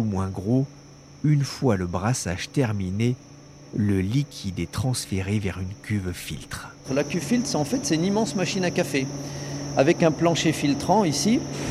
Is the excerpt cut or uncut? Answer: uncut